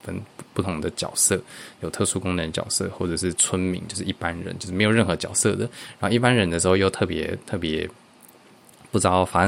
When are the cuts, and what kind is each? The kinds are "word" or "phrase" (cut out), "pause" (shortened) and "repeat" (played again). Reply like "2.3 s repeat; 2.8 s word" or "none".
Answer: none